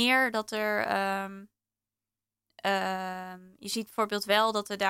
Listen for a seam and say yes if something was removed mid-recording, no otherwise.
no